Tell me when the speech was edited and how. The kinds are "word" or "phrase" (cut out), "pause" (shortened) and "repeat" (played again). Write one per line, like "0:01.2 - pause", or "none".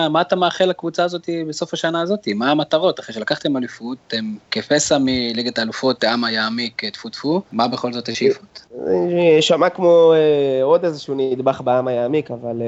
0:07.1 - word